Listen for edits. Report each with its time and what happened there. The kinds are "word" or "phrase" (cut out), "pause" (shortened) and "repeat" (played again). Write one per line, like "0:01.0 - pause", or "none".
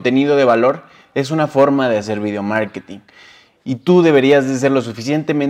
none

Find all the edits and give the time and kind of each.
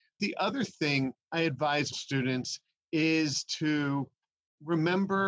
0:01.2 - pause
0:01.9 - word

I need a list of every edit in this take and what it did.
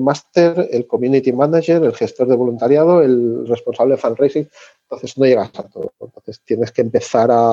none

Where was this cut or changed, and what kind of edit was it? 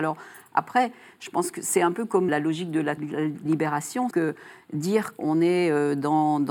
0:02.3 - word
0:03.0 - word
0:03.5 - word
0:04.1 - word
0:05.2 - word

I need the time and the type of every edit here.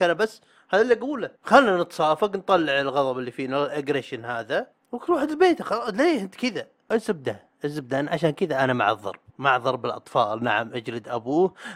0:01.3 - pause
0:04.7 - pause
0:09.3 - pause

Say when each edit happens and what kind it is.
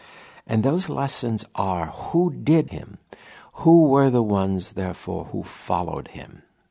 0:02.7 - word

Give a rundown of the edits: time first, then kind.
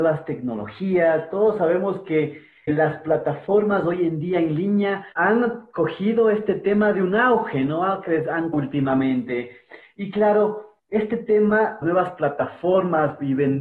0:02.7 - word
0:05.1 - pause
0:08.5 - word
0:10.8 - pause
0:11.8 - phrase

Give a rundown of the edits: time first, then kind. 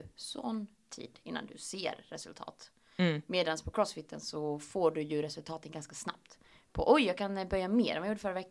none

